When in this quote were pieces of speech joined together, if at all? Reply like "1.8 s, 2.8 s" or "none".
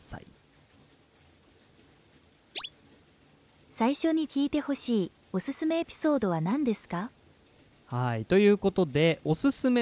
none